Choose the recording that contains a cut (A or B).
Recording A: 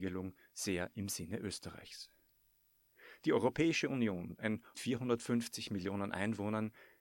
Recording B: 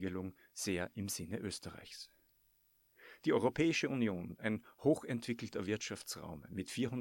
A